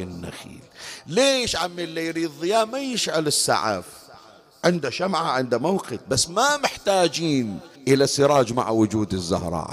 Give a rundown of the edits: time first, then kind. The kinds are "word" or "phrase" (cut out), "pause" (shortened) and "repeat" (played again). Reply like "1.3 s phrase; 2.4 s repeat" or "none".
7.8 s pause